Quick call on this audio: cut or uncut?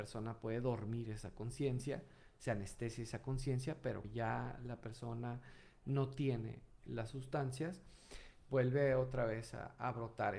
cut